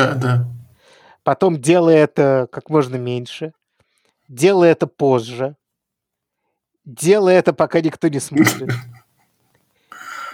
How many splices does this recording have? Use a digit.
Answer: 0